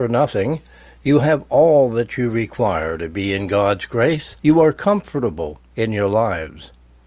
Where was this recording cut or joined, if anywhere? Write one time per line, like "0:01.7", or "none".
0:04.4